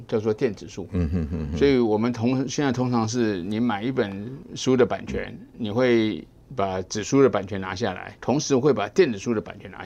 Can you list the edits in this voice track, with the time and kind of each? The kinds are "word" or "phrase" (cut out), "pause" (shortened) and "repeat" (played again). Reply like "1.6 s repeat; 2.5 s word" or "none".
8.2 s word